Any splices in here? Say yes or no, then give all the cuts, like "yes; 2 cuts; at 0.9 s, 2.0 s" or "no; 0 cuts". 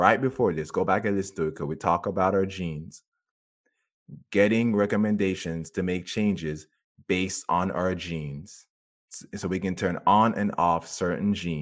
no; 0 cuts